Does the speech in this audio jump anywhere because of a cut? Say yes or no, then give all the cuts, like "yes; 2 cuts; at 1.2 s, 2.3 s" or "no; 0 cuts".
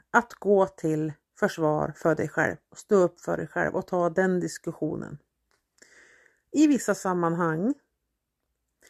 no; 0 cuts